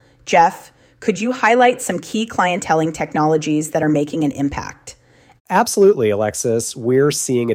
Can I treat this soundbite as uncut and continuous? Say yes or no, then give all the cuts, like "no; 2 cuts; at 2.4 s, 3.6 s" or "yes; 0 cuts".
yes; 0 cuts